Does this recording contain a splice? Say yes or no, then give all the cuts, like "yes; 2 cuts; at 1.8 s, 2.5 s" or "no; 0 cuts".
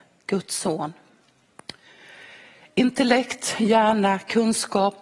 no; 0 cuts